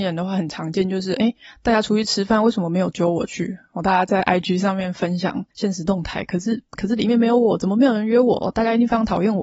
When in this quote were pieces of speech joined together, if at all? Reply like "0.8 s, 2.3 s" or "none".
5.5 s